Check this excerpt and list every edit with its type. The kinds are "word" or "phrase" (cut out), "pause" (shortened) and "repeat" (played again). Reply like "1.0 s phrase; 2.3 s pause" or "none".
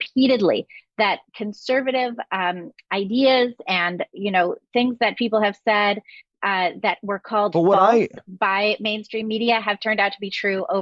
none